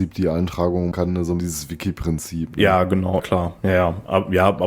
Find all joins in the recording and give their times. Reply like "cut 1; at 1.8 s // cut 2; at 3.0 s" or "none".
cut 1; at 0.9 s // cut 2; at 1.4 s // cut 3; at 3.2 s